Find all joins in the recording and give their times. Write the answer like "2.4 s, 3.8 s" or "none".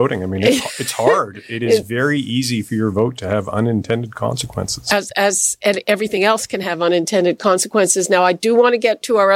none